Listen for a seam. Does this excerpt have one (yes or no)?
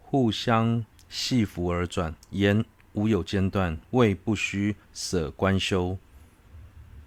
yes